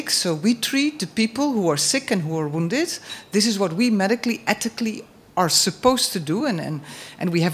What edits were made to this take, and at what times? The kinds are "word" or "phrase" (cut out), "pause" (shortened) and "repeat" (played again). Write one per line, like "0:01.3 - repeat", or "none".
none